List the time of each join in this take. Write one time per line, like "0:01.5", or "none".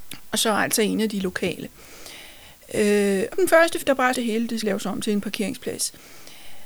0:03.3
0:03.8
0:04.1
0:04.6